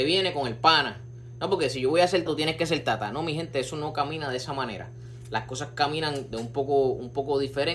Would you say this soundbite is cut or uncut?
cut